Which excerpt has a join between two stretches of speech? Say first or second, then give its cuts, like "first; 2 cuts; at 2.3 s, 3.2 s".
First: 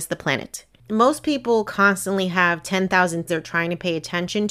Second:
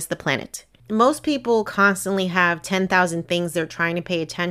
first; 1 cut; at 3.3 s